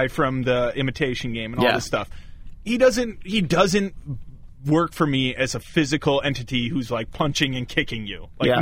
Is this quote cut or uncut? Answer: uncut